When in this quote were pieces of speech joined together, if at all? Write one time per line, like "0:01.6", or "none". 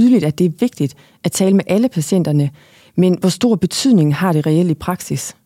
none